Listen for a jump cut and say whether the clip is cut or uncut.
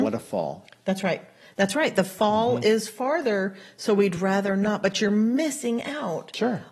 uncut